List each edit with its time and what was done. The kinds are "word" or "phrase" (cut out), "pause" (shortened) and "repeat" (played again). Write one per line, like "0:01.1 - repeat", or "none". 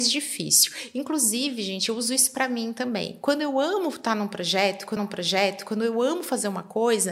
0:05.0 - repeat